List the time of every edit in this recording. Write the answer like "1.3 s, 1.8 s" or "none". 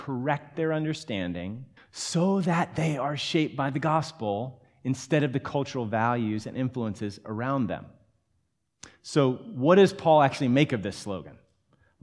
1.8 s